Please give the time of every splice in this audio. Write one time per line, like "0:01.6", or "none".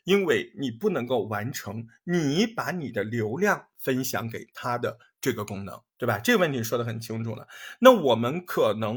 0:05.9